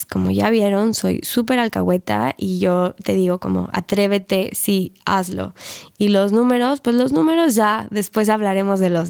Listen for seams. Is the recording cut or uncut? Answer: uncut